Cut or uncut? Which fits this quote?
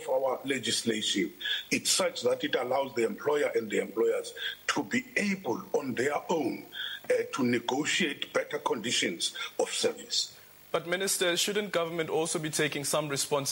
uncut